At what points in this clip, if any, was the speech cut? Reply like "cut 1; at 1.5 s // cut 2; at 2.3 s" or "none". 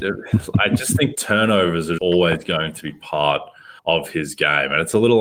cut 1; at 1.1 s // cut 2; at 2.0 s // cut 3; at 3.8 s